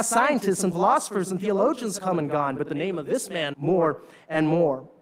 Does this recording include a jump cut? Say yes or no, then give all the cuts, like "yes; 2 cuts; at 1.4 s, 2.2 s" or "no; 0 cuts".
yes; 2 cuts; at 2.0 s, 3.5 s